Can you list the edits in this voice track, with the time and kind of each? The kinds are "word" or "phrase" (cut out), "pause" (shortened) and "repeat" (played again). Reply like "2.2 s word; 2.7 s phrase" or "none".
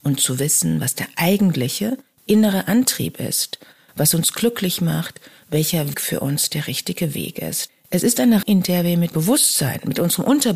5.9 s word; 8.4 s word; 9.1 s word